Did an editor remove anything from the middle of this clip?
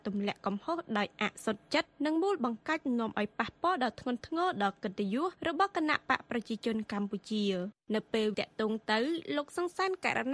yes; 1 cut; at 8.3 s

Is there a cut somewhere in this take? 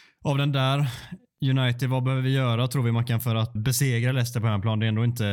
yes; 1 cut; at 3.6 s

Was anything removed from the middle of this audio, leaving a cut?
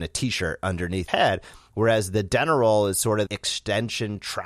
yes; 2 cuts; at 1.1 s, 3.3 s

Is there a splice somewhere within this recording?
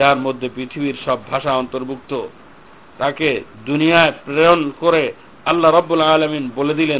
no; 0 cuts

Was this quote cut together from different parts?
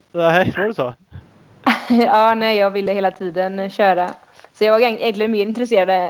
no; 0 cuts

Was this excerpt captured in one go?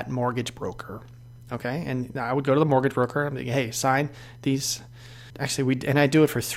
no; 1 cut; at 5.3 s

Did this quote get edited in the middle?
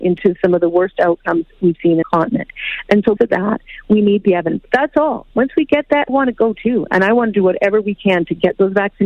yes; 4 cuts; at 2.0 s, 3.2 s, 5.3 s, 6.1 s

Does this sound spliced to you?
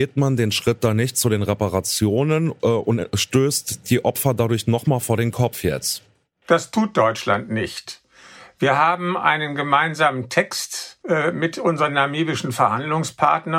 no; 0 cuts

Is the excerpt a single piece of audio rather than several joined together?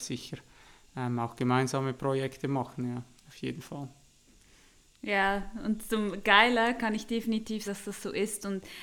no; 1 cut; at 7.7 s

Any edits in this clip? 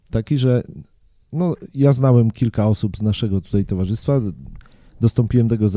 no; 0 cuts

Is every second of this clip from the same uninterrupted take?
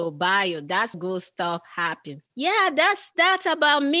no; 2 cuts; at 0.9 s, 2.3 s

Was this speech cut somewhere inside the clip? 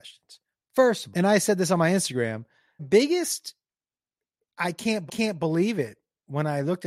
yes; 3 cuts; at 1.1 s, 2.8 s, 5.1 s

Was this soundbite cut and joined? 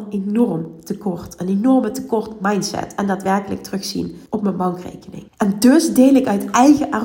yes; 2 cuts; at 4.3 s, 5.3 s

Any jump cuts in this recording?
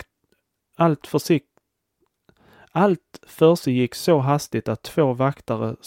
no; 0 cuts

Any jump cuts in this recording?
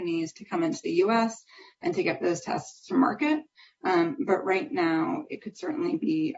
no; 0 cuts

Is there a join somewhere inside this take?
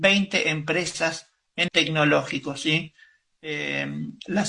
yes; 1 cut; at 1.7 s

